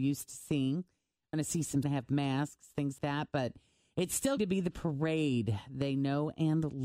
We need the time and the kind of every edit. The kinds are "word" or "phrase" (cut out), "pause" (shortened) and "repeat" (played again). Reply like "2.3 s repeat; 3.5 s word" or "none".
1.3 s word; 1.8 s phrase; 3.0 s word; 4.4 s word